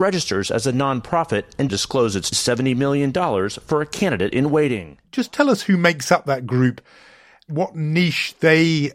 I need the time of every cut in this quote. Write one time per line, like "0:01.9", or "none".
0:01.7
0:02.3